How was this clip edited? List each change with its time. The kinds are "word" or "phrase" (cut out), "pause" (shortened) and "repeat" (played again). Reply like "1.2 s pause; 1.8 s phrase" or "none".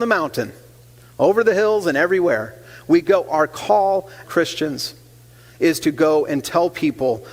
4.2 s word